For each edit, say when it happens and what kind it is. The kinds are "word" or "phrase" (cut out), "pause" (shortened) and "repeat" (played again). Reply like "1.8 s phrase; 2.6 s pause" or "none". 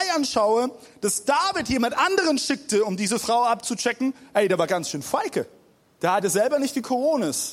5.8 s pause